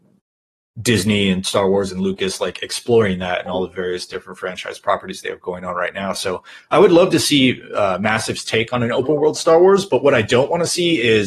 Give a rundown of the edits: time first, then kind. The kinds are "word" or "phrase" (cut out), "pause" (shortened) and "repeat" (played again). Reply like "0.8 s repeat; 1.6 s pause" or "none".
none